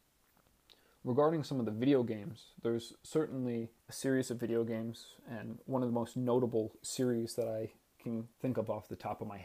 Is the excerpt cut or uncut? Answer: cut